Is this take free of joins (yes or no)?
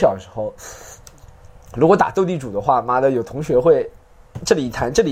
yes